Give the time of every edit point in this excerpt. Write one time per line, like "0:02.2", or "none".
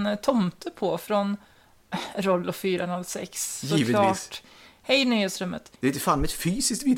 0:05.8